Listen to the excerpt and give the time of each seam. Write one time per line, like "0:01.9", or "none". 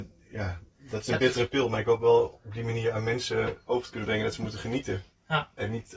none